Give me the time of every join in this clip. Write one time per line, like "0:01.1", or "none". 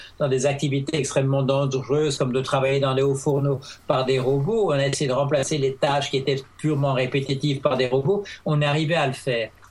none

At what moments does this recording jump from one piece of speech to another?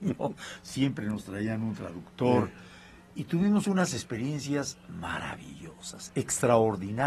none

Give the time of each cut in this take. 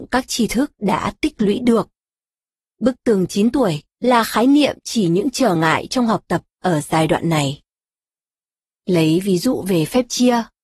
none

